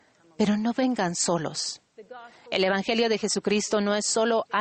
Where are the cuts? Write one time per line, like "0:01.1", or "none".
none